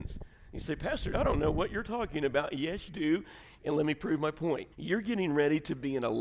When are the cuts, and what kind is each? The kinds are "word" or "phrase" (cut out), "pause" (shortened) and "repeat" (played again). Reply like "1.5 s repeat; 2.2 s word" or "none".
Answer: 1.1 s word; 2.9 s word; 4.7 s pause